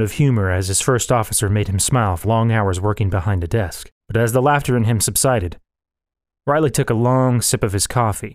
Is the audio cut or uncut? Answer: cut